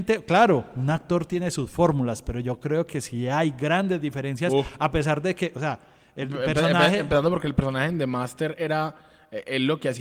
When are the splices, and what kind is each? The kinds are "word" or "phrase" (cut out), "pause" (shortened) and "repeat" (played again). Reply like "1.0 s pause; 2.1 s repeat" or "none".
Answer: none